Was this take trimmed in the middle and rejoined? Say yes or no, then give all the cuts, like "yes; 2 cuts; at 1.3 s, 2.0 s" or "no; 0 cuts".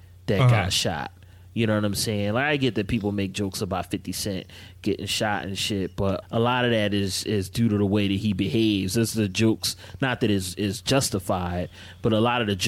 yes; 1 cut; at 6.2 s